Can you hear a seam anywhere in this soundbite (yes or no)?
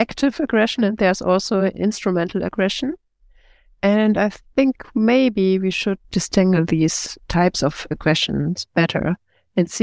no